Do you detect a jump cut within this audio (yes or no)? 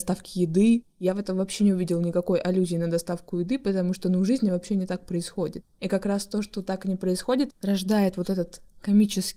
no